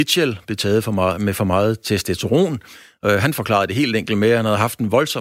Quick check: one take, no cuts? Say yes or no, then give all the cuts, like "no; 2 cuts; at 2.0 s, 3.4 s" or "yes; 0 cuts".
yes; 0 cuts